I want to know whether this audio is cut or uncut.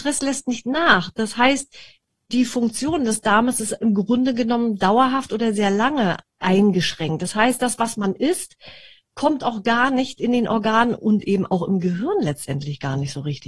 cut